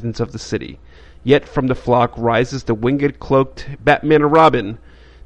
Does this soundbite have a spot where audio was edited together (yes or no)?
no